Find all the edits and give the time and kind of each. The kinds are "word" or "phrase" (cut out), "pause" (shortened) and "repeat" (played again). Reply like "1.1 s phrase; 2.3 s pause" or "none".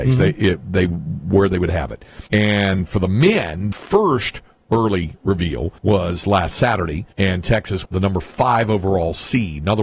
2.3 s pause; 3.7 s word; 5.8 s pause; 7.1 s pause; 7.9 s word